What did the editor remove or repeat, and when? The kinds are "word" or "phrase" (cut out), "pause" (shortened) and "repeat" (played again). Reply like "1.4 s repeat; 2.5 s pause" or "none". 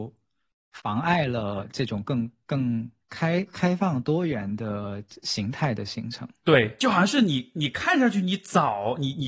3.0 s pause